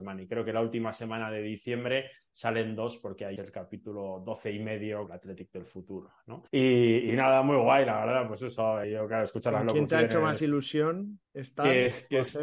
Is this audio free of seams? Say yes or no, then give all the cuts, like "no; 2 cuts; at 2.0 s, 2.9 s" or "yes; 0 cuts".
no; 5 cuts; at 3.4 s, 5.1 s, 6.5 s, 8.8 s, 11.3 s